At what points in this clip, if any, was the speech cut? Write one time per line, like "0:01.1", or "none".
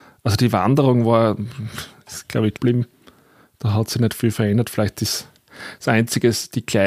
0:02.5